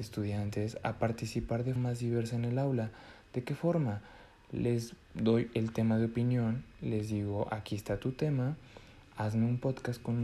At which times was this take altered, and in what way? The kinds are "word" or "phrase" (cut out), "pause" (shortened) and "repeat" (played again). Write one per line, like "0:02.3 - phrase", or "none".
0:01.8 - word